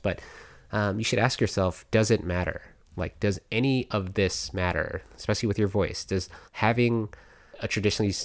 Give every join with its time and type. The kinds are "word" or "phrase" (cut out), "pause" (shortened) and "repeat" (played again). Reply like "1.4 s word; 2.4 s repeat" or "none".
6.4 s pause

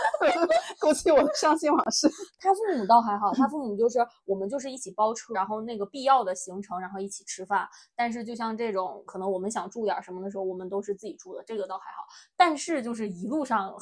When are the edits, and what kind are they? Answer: 5.3 s word; 9.1 s word

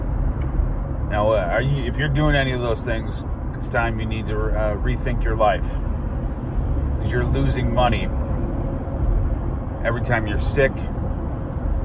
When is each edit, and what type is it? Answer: 3.5 s word

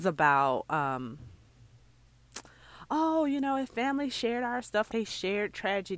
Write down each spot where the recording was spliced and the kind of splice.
4.9 s word

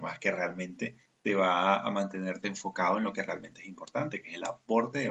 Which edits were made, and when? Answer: none

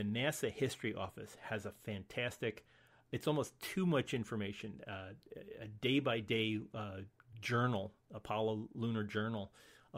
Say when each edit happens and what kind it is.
none

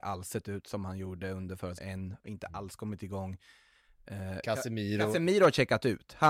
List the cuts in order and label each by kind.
1.8 s word

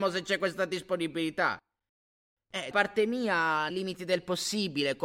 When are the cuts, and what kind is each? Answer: 2.7 s word; 3.7 s word

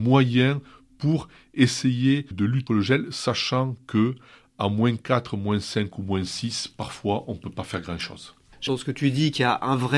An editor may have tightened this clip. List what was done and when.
2.3 s word; 2.7 s word; 8.7 s word

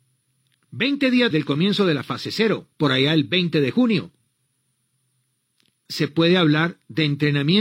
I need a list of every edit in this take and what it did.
1.3 s word; 2.7 s pause; 5.9 s word

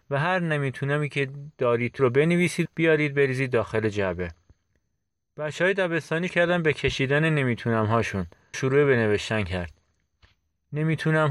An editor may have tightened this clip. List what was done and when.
2.0 s word; 2.7 s word; 6.3 s word; 8.5 s word

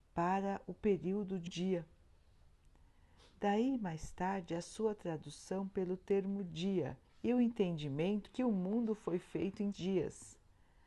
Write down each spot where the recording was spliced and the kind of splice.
1.5 s word; 7.0 s pause; 8.3 s word; 9.7 s word

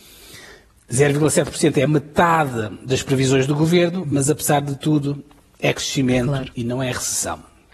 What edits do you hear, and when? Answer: none

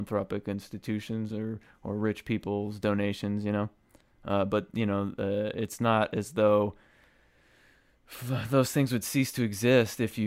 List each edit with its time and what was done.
none

